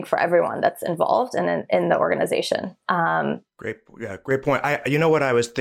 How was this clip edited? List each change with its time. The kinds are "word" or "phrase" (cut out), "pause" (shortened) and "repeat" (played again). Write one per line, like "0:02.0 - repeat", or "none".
0:03.5 - pause